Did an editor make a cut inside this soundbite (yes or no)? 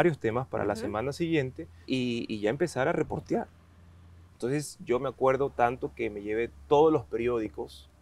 yes